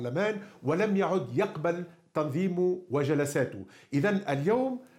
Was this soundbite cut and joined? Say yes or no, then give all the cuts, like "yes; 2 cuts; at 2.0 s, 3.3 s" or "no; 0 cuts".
no; 0 cuts